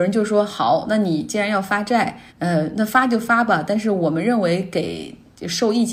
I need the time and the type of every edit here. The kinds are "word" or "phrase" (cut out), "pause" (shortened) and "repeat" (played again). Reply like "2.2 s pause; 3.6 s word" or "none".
2.3 s pause